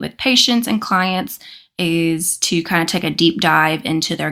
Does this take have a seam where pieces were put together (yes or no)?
no